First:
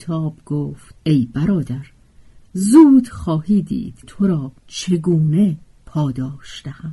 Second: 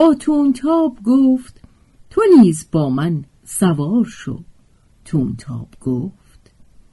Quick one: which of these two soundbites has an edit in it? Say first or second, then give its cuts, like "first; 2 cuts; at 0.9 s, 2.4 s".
first; 3 cuts; at 1.0 s, 4.0 s, 4.6 s